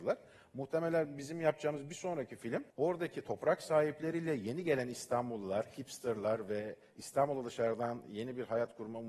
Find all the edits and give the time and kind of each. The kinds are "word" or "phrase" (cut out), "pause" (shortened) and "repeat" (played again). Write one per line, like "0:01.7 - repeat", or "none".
0:02.7 - pause

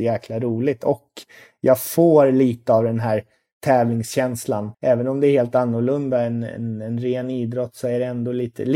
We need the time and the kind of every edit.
0:04.7 - pause

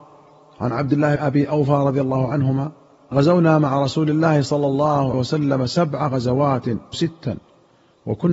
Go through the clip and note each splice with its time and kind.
0:01.2 - word
0:03.1 - word
0:05.1 - word
0:06.9 - word

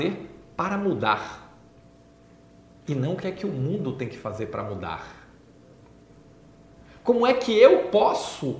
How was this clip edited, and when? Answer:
none

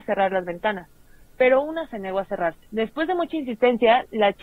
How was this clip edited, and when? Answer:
0:02.7 - pause

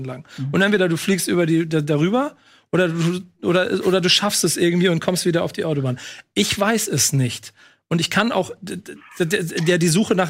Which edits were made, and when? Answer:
none

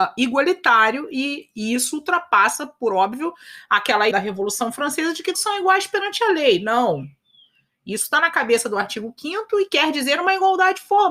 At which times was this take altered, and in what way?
0:04.1 - word
0:05.3 - word

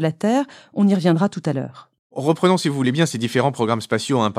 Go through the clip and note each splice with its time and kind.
none

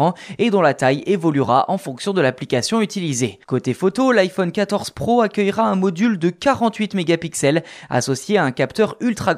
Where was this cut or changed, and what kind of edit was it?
0:03.4 - pause

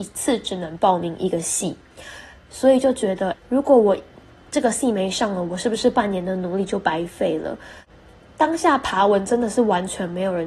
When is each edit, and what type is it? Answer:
0:03.3 - word

